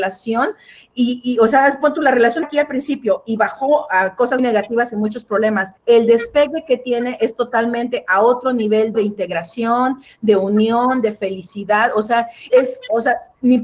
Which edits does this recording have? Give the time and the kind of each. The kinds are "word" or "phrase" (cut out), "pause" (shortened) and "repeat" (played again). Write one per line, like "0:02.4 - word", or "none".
0:02.4 - word
0:04.4 - word
0:05.8 - pause
0:08.9 - word
0:12.5 - word